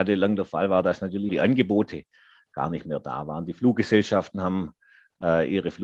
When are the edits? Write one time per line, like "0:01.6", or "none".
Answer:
0:01.3